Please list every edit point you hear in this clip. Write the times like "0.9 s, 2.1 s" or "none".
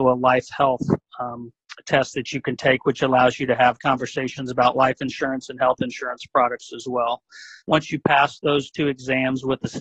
7.6 s